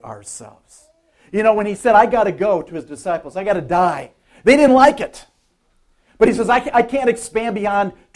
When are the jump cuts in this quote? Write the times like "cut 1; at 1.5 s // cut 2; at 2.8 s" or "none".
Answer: none